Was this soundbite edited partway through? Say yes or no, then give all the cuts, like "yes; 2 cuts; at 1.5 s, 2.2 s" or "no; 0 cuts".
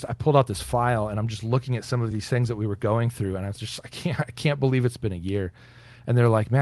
no; 0 cuts